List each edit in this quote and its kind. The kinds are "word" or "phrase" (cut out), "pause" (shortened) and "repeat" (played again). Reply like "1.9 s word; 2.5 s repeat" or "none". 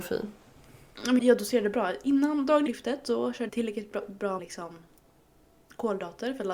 1.2 s word; 2.7 s word; 3.5 s word; 4.4 s word